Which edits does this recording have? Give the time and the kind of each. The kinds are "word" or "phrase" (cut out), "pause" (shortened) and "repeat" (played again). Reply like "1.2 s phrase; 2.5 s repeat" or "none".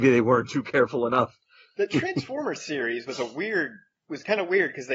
none

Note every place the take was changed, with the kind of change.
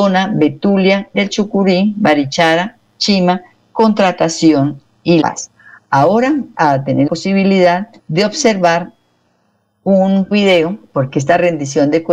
1.1 s word; 5.2 s word; 6.5 s word; 7.1 s word; 8.0 s pause; 10.3 s word

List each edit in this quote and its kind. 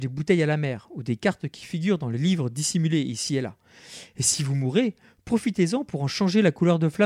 none

